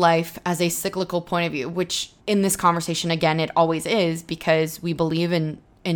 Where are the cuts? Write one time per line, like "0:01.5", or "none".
0:02.2